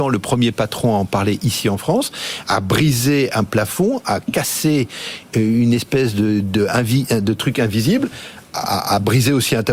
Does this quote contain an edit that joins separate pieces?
no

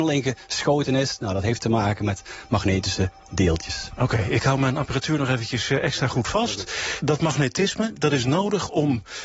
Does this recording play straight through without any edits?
yes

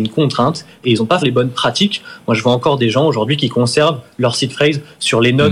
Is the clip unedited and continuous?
no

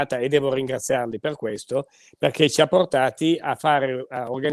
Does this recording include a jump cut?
no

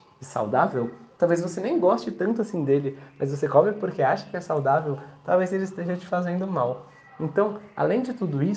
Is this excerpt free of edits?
yes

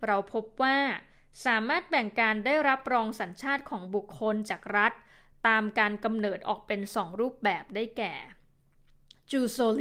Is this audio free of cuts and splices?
yes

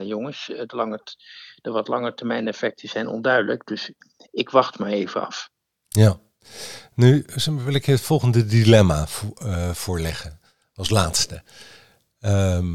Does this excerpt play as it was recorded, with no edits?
yes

